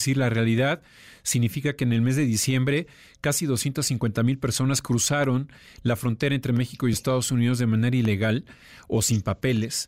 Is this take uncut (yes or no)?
yes